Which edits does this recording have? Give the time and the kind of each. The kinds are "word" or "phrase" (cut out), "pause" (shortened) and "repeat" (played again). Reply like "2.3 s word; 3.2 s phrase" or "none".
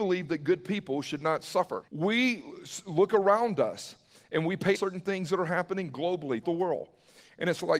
1.9 s pause; 4.7 s phrase; 6.4 s word